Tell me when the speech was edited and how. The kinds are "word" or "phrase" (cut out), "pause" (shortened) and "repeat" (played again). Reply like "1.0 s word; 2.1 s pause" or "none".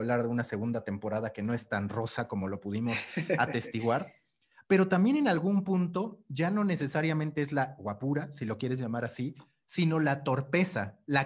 none

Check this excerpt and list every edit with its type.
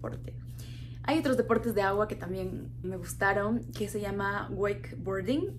2.8 s word

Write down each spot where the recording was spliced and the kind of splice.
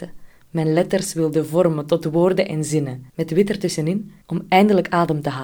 3.1 s pause; 4.2 s pause

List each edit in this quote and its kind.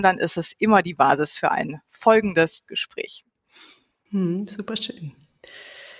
2.7 s word

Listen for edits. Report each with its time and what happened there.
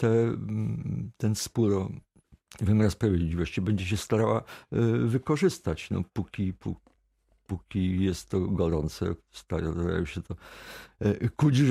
none

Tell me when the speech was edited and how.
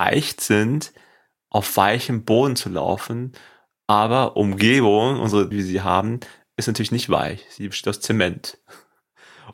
4.4 s word; 5.5 s word

